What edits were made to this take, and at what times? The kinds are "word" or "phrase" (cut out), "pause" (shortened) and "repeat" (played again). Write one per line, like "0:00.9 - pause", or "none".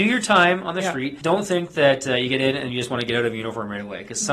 none